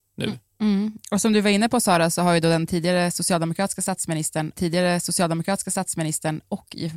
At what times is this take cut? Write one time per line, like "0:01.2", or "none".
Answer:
0:04.6